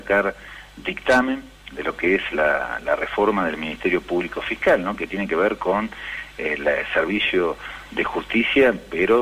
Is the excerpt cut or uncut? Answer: cut